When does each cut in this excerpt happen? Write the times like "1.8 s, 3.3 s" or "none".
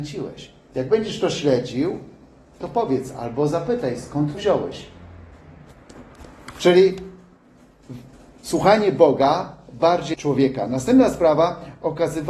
2.6 s, 4.3 s, 8.1 s, 10.1 s

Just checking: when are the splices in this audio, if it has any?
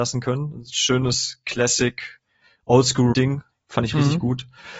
3.1 s

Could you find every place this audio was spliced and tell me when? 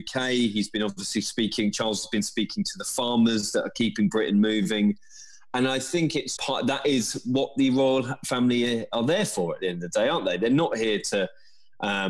6.4 s

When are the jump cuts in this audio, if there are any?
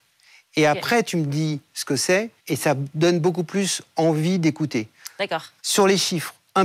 2.4 s, 5.6 s

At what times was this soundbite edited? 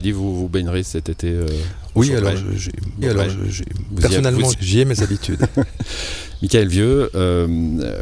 3.0 s, 4.5 s

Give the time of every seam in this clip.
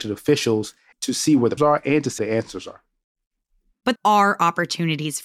0.9 s, 1.6 s, 2.2 s, 4.0 s

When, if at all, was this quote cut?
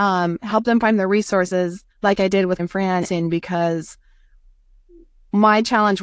1.9 s, 2.6 s, 3.0 s

